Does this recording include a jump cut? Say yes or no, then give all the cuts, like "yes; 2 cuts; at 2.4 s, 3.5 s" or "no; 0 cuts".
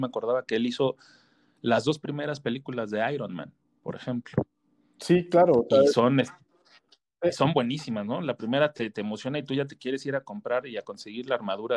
no; 0 cuts